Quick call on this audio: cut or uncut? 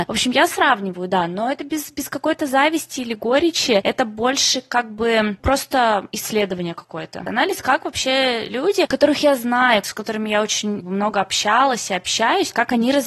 uncut